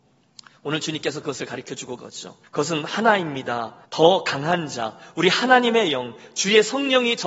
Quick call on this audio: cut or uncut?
cut